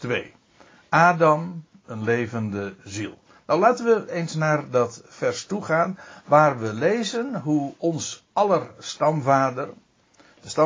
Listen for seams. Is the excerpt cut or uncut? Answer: uncut